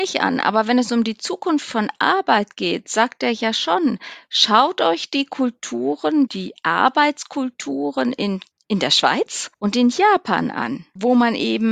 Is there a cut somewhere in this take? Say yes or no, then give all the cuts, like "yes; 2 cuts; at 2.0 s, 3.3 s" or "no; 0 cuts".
no; 0 cuts